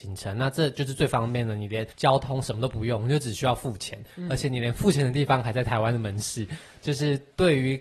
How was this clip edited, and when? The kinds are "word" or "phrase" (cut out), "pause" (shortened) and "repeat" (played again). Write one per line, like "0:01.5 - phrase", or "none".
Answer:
0:01.9 - pause